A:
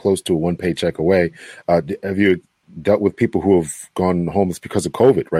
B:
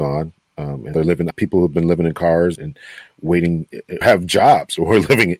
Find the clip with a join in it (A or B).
B